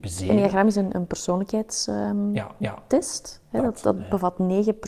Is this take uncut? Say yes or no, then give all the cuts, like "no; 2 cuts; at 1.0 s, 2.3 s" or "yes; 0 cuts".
no; 1 cut; at 2.6 s